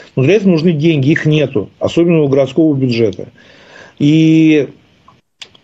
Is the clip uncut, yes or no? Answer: yes